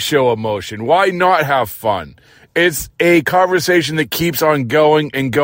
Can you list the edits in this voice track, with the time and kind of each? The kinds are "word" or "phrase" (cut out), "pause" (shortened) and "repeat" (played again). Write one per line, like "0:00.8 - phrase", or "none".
none